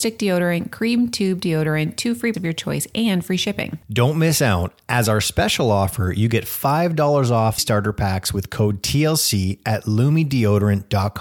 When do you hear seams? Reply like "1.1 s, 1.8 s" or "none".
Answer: 2.3 s, 7.6 s